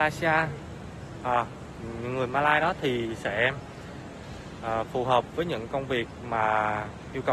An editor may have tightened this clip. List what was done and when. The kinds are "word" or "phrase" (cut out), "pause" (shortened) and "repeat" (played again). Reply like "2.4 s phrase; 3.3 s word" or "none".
none